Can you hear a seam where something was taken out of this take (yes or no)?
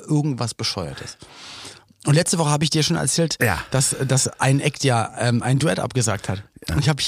no